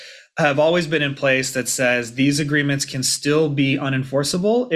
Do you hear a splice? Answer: no; 0 cuts

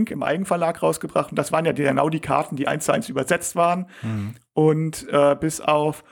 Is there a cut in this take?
no; 0 cuts

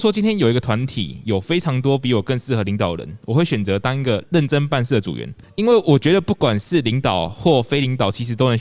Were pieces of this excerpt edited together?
no; 0 cuts

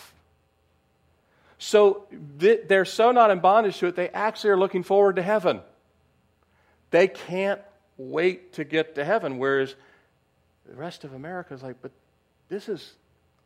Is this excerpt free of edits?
yes; 0 cuts

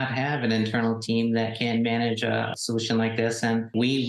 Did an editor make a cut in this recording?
no; 0 cuts

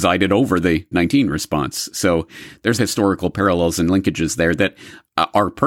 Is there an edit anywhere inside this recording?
yes; 2 cuts; at 0.9 s, 2.8 s

